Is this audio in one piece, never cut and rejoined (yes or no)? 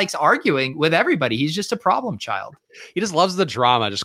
yes